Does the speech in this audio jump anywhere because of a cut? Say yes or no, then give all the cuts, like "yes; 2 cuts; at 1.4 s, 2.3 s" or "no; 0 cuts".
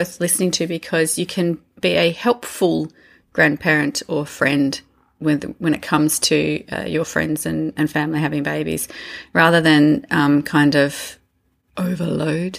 no; 0 cuts